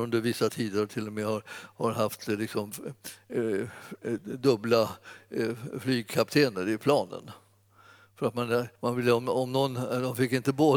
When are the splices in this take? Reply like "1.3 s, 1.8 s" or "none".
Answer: 8.8 s